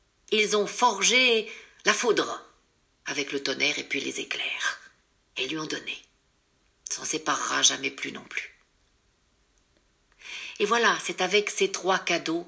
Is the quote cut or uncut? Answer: uncut